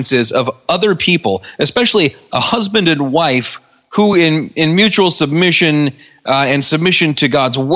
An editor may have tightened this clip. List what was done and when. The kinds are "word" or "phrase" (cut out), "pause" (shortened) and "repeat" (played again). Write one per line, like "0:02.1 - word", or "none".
none